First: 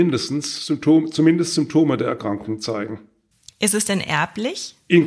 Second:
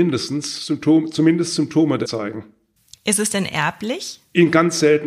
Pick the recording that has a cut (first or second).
second